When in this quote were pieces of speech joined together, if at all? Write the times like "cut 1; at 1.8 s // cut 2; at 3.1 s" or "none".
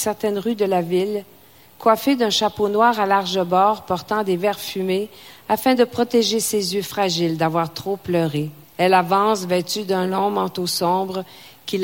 cut 1; at 8.6 s